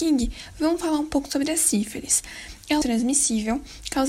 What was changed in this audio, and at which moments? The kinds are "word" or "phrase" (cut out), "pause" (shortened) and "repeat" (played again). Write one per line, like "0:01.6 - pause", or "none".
0:02.8 - phrase